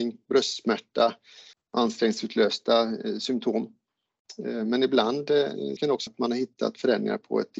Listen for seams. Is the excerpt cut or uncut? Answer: cut